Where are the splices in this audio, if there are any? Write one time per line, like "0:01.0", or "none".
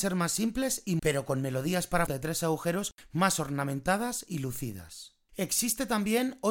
0:01.0
0:02.1